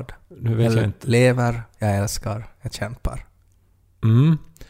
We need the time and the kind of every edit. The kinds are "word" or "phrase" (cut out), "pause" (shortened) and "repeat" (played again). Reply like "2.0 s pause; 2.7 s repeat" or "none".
none